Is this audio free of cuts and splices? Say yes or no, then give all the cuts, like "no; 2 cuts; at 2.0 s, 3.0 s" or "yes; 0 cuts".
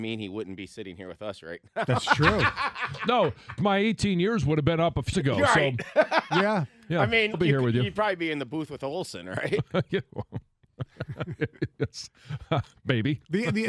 no; 3 cuts; at 3.6 s, 5.1 s, 7.3 s